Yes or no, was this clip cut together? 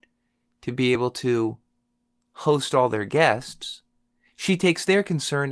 no